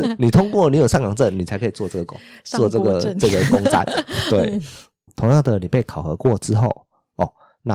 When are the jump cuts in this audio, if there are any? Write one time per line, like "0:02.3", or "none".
0:05.1

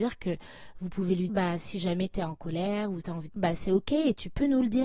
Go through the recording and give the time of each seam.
0:01.3
0:03.0
0:03.4

